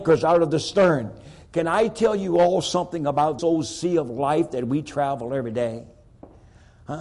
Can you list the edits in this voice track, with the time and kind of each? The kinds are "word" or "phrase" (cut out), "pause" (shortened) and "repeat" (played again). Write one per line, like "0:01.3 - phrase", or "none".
0:03.4 - word